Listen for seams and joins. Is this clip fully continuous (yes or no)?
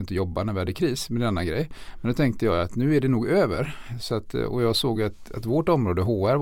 yes